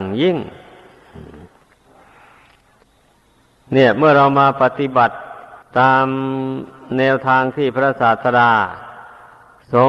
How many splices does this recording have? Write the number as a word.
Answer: one